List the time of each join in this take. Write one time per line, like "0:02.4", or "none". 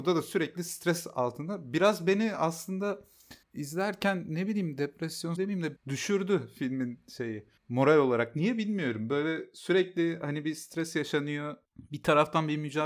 0:03.4
0:05.4
0:05.8
0:07.6